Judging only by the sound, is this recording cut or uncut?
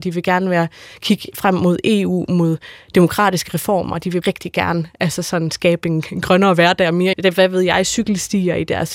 cut